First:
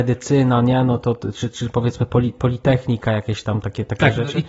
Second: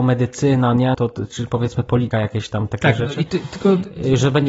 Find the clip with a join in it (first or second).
second